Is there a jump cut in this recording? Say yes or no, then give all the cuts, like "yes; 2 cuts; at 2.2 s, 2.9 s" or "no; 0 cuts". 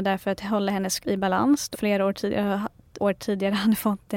yes; 3 cuts; at 1.0 s, 1.7 s, 3.0 s